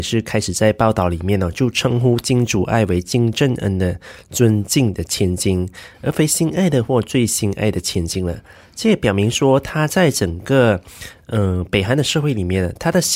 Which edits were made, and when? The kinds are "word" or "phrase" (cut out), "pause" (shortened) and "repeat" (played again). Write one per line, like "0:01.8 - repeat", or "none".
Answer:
none

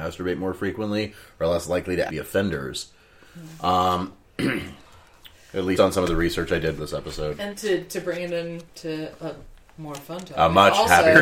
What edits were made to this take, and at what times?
0:02.1 - word
0:05.8 - word
0:06.8 - word
0:07.5 - word
0:08.7 - pause

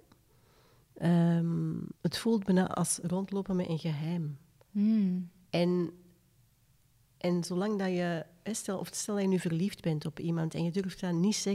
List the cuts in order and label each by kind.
0:02.0 - pause

